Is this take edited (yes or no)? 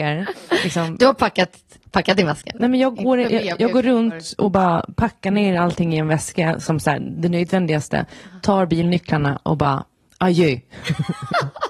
no